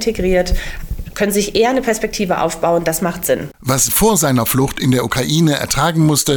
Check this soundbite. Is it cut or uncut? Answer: cut